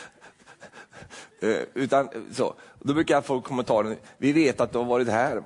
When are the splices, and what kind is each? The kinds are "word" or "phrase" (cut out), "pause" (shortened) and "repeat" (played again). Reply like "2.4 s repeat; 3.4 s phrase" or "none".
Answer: none